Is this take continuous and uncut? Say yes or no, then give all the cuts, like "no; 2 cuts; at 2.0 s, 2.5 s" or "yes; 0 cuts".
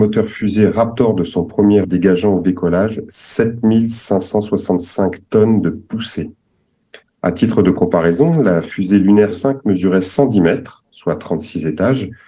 no; 3 cuts; at 1.8 s, 7.0 s, 9.3 s